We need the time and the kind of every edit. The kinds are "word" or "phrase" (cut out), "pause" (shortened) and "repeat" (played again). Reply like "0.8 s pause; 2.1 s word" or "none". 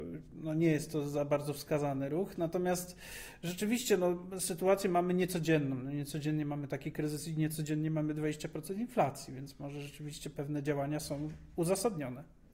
none